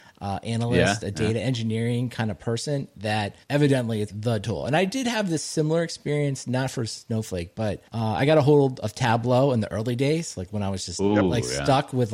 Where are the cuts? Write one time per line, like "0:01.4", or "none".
0:03.4
0:04.1
0:07.9